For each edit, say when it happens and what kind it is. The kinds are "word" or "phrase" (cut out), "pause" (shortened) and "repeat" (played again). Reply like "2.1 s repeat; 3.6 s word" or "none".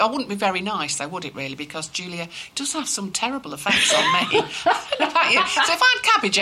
none

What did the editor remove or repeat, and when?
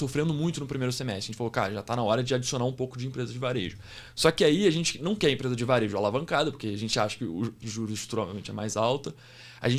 7.6 s phrase

